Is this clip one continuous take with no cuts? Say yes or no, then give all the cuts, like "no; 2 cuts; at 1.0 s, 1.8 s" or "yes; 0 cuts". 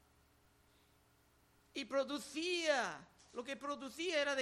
yes; 0 cuts